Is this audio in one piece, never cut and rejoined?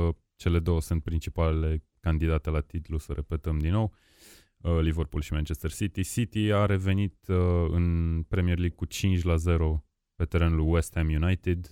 yes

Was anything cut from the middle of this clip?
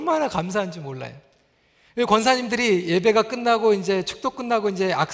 no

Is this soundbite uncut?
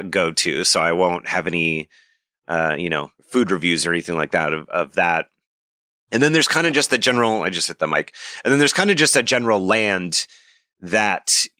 no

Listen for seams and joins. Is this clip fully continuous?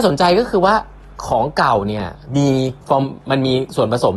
no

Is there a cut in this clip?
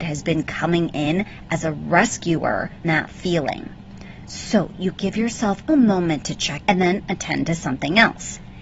yes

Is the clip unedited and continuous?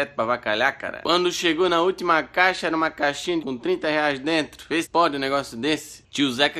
no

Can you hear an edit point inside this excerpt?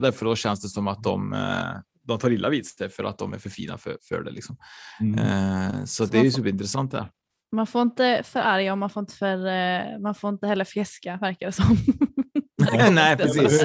no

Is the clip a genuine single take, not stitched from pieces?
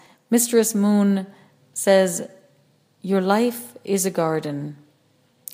yes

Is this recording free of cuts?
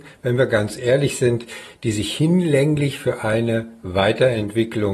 yes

